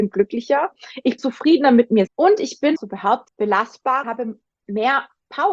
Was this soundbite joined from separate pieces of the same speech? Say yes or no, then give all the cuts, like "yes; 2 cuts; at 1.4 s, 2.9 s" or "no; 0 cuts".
yes; 5 cuts; at 1.2 s, 2.1 s, 2.8 s, 3.3 s, 4.0 s